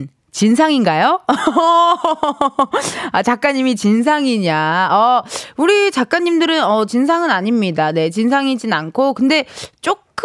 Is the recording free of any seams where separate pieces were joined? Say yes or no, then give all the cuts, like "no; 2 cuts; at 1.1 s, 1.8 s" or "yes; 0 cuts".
yes; 0 cuts